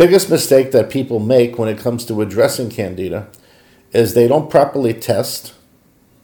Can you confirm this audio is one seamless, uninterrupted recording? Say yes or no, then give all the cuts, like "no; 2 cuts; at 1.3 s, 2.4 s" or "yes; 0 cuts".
yes; 0 cuts